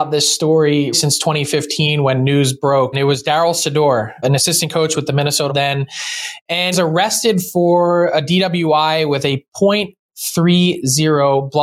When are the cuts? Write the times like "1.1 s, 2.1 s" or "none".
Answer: 0.9 s, 2.9 s, 4.2 s, 5.5 s, 6.7 s

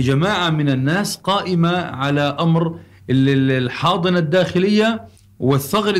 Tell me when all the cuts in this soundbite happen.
none

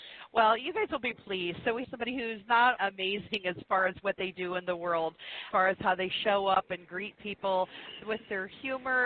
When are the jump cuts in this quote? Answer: 1.1 s, 1.8 s, 2.8 s, 5.5 s, 8.0 s

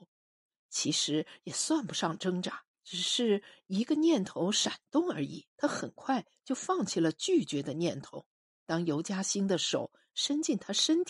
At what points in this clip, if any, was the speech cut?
2.7 s, 5.5 s, 8.4 s

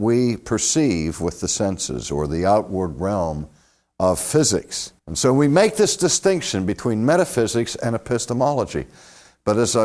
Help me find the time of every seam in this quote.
5.0 s

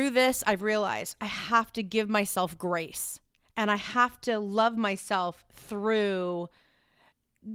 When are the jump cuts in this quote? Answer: none

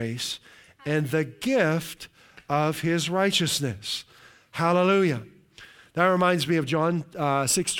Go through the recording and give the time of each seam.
none

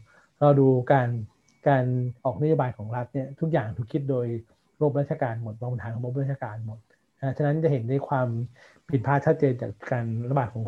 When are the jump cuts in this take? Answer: 2.2 s

